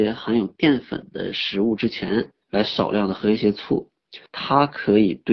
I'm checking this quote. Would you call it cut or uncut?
cut